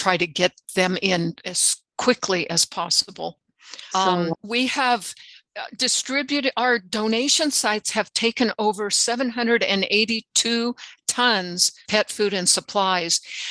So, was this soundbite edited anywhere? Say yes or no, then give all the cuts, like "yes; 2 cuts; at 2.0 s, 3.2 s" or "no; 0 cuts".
yes; 3 cuts; at 3.9 s, 4.3 s, 11.9 s